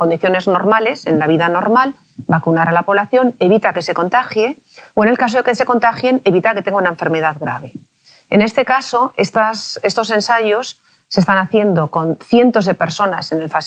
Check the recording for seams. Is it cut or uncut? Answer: uncut